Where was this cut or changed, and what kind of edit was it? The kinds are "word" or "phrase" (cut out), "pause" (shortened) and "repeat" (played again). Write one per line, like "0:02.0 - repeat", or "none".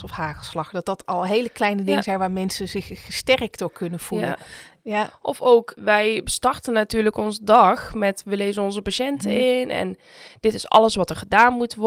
0:05.8 - word